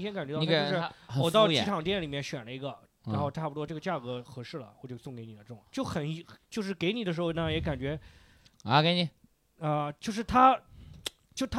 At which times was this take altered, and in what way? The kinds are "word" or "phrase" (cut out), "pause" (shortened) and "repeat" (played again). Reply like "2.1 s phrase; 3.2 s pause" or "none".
5.7 s pause